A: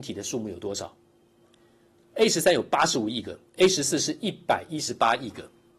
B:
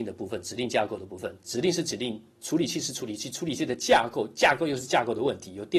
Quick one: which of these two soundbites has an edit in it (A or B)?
B